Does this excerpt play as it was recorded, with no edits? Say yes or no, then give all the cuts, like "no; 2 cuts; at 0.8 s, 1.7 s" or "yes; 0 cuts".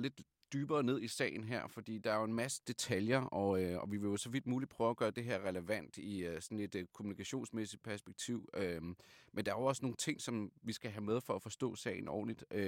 yes; 0 cuts